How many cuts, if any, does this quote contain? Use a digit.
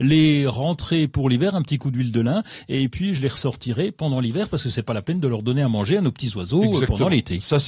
0